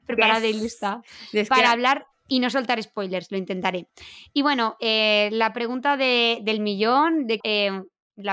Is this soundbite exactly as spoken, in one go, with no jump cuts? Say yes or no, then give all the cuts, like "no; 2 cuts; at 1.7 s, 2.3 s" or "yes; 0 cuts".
no; 2 cuts; at 2.1 s, 7.4 s